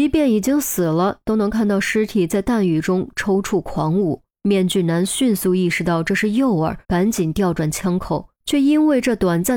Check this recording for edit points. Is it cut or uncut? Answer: cut